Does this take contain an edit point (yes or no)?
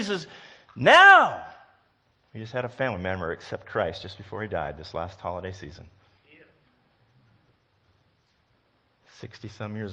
yes